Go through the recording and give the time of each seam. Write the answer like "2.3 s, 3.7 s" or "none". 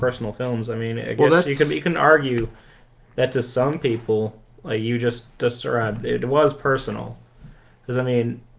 none